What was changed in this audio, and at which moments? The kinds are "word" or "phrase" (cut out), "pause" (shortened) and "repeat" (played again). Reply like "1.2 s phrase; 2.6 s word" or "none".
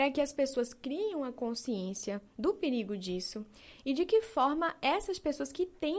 none